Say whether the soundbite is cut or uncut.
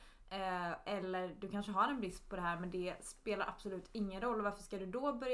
uncut